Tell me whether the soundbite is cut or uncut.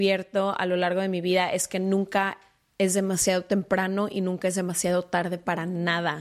uncut